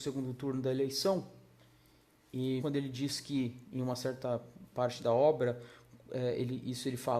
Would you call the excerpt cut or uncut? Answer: cut